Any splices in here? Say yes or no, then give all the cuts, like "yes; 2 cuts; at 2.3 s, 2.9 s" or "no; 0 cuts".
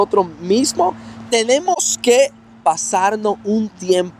no; 0 cuts